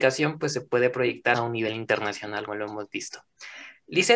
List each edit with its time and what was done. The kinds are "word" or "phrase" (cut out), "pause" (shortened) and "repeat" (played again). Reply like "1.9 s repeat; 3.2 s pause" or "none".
1.3 s word; 2.5 s word